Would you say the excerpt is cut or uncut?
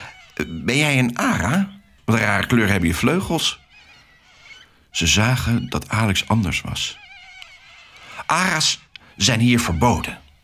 uncut